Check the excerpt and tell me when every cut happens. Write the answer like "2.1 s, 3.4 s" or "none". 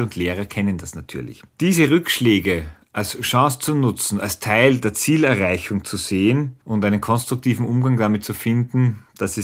1.5 s, 6.6 s